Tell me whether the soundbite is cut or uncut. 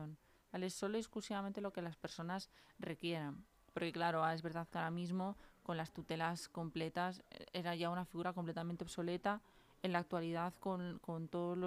uncut